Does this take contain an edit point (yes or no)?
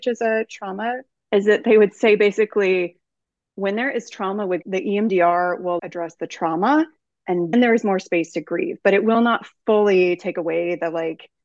yes